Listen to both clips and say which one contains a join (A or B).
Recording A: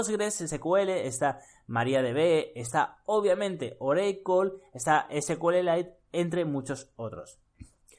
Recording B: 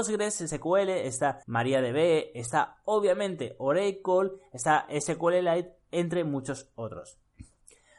B